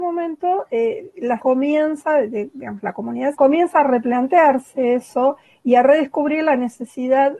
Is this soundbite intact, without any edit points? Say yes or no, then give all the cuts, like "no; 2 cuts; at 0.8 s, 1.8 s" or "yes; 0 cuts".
no; 2 cuts; at 1.4 s, 3.3 s